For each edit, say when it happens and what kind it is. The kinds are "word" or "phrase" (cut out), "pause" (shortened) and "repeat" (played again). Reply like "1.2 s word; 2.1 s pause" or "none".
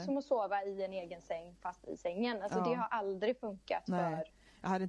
none